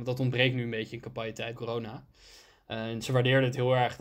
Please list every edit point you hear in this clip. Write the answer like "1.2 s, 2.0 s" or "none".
1.5 s